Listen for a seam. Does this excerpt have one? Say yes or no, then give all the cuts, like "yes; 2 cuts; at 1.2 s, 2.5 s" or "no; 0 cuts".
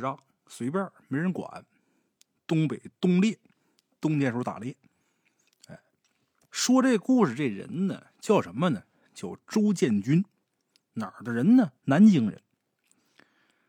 yes; 2 cuts; at 8.1 s, 11.8 s